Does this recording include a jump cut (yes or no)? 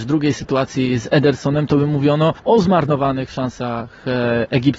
yes